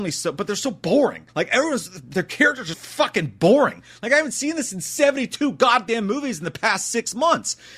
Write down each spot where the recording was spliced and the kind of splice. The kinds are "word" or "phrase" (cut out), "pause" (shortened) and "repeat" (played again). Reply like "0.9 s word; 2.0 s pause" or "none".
1.3 s pause; 2.7 s word